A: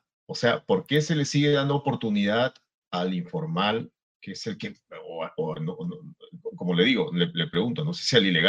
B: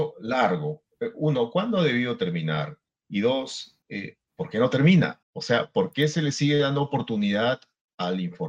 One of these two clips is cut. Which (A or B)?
B